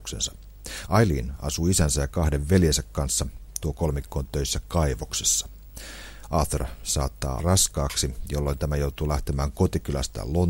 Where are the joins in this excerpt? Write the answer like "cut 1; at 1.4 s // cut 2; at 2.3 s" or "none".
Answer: cut 1; at 7.4 s